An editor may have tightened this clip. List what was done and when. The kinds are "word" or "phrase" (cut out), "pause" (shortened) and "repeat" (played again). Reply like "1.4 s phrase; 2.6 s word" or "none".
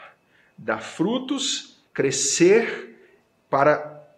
1.9 s pause